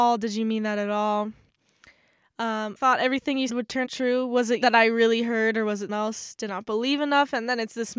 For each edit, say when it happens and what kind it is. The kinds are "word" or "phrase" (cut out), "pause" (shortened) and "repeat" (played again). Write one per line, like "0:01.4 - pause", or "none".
0:02.8 - word
0:03.5 - word
0:03.8 - word
0:04.6 - word
0:05.9 - word
0:06.5 - word